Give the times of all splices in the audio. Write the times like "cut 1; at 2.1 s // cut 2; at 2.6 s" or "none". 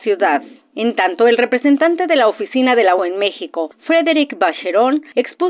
cut 1; at 3.0 s